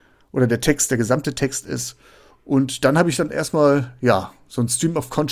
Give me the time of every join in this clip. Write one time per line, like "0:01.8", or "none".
none